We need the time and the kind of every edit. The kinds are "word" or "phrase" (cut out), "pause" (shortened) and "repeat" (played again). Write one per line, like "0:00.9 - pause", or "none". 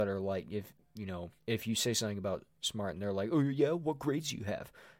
0:01.4 - pause